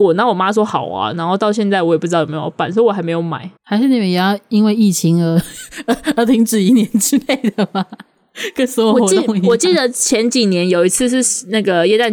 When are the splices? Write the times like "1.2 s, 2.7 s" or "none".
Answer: 3.6 s